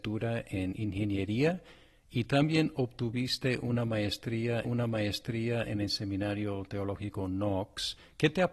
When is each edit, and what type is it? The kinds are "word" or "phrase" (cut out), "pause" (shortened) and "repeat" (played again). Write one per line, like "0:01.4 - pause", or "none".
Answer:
0:04.6 - repeat